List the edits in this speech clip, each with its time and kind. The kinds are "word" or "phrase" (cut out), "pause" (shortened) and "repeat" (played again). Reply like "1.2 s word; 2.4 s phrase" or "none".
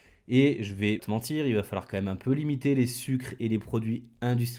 1.0 s word